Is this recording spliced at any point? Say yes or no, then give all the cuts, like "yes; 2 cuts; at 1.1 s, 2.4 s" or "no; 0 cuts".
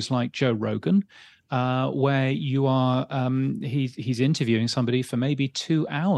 no; 0 cuts